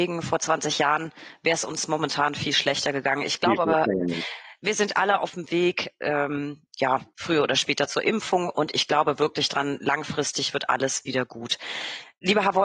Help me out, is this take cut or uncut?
uncut